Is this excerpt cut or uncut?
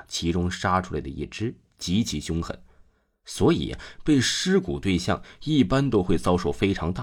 uncut